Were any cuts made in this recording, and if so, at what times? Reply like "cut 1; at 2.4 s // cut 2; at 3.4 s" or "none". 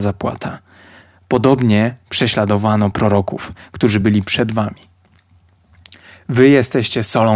none